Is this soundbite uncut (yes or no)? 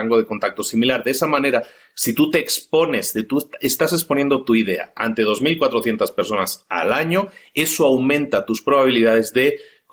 yes